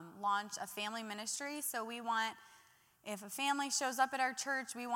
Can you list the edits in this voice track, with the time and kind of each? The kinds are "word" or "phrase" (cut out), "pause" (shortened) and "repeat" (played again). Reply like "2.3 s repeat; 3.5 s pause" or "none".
none

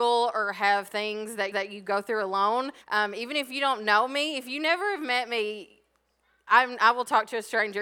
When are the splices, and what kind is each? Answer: 1.5 s repeat; 2.8 s pause

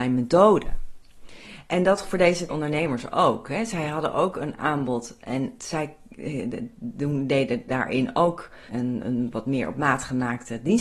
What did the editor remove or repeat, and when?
2.0 s word; 2.5 s word; 5.6 s word; 8.7 s word

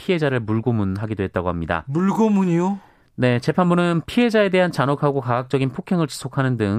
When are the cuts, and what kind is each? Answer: none

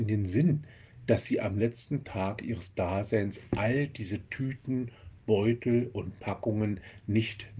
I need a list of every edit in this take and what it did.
none

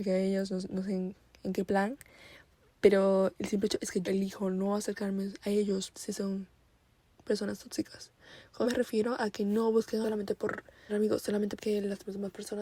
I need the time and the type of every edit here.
4.0 s word; 5.9 s word; 8.6 s word; 10.0 s word; 10.9 s word; 11.6 s word

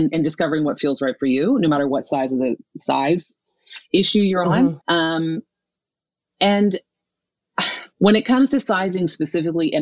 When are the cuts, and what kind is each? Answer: 4.8 s pause; 7.9 s pause

